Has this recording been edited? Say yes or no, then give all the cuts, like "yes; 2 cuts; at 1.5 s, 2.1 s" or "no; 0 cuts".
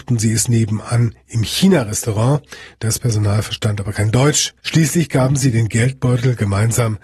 yes; 1 cut; at 4.6 s